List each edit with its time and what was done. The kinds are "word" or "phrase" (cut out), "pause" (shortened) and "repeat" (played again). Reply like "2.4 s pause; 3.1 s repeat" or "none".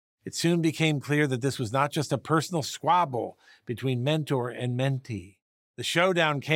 none